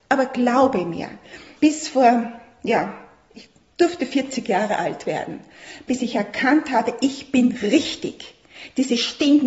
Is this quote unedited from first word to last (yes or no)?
yes